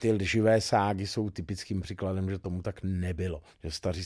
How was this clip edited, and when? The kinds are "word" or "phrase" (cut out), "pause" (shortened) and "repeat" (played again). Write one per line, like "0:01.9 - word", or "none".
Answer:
none